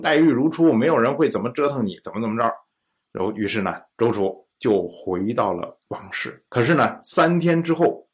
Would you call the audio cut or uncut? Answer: cut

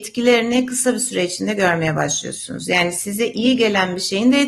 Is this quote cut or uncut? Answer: uncut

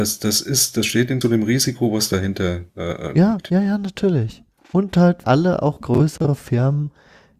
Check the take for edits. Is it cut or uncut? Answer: cut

